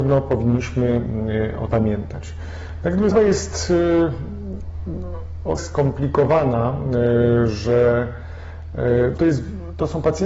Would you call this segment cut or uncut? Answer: cut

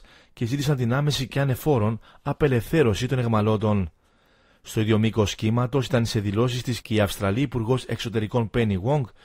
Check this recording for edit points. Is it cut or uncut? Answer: uncut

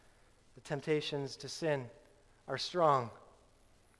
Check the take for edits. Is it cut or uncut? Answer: uncut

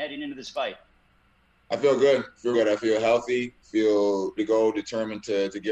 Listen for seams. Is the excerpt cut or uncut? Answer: cut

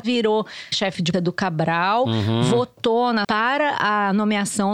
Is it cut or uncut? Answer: cut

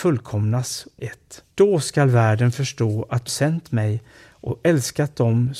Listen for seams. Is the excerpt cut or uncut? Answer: cut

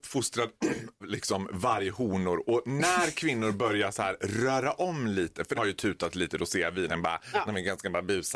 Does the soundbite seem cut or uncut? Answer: cut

